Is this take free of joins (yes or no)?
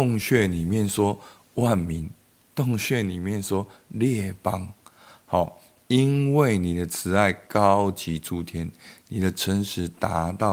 yes